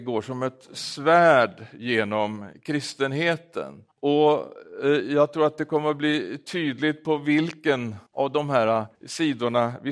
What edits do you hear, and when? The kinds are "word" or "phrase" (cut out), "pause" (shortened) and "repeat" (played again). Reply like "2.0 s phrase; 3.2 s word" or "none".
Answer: 3.9 s pause; 8.1 s pause; 8.9 s pause